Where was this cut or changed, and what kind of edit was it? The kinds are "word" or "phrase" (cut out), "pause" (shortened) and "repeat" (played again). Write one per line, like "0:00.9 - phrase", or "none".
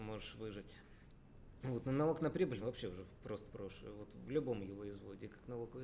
0:02.6 - phrase
0:03.5 - phrase

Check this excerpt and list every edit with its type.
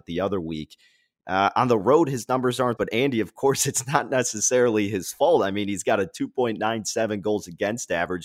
0:02.8 - phrase

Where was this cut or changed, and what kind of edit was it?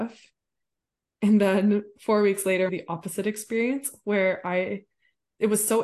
0:02.7 - phrase

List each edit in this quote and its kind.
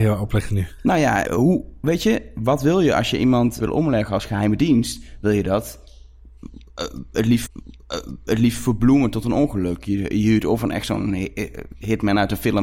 0:01.2 - phrase
0:03.6 - word
0:07.5 - repeat

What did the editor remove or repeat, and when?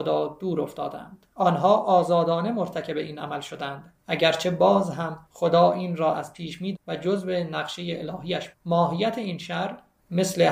0:01.3 - pause
0:04.0 - pause
0:05.3 - pause
0:06.7 - word
0:08.5 - word

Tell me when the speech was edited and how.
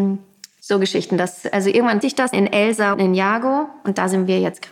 0:02.0 - word
0:02.3 - word
0:02.9 - word

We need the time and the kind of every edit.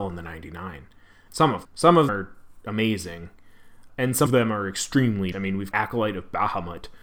0:01.3 - word
0:01.6 - word
0:02.1 - word
0:02.6 - word
0:03.9 - word
0:04.3 - word
0:05.3 - word
0:05.7 - word

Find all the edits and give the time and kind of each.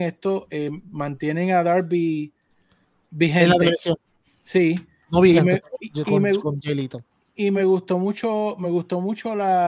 none

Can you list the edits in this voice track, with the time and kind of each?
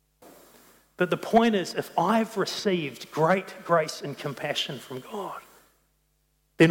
none

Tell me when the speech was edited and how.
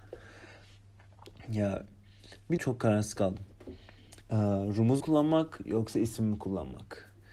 0:02.6 - phrase
0:04.2 - pause
0:05.0 - word

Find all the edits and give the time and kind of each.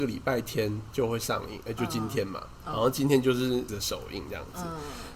0:03.7 - word

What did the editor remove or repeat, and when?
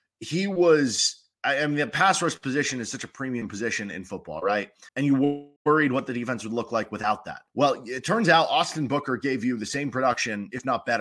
0:01.3 - pause
0:04.9 - pause
0:05.6 - pause
0:07.5 - pause

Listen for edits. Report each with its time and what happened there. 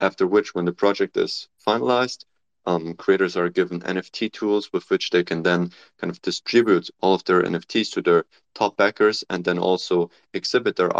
none

